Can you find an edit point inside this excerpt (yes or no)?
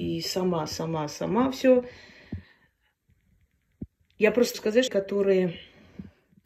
yes